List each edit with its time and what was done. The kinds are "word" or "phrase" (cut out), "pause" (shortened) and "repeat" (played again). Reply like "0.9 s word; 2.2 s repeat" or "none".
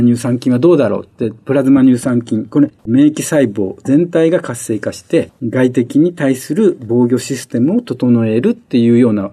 5.4 s pause